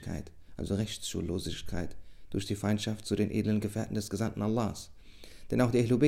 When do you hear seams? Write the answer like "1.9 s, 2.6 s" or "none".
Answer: none